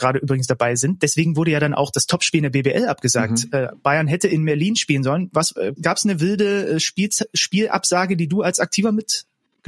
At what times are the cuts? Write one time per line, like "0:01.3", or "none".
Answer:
0:05.8